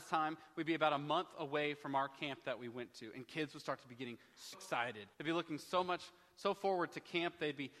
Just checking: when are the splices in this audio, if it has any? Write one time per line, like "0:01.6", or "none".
0:04.5
0:05.1